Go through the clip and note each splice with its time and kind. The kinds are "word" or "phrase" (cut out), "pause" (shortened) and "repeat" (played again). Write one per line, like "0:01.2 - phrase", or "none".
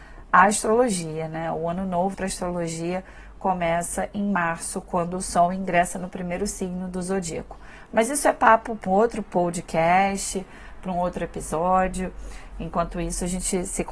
0:02.1 - word
0:08.9 - word